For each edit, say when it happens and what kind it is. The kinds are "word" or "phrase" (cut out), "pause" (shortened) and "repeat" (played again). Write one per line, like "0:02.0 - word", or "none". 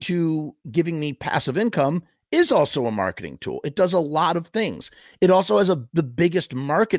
none